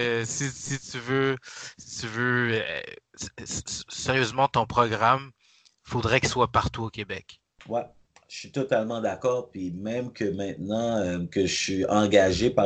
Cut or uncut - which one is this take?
uncut